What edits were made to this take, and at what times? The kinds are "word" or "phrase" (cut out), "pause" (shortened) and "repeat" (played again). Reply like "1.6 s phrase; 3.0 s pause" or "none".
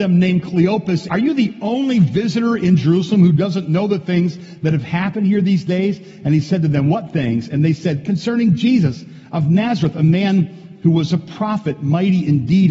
1.1 s word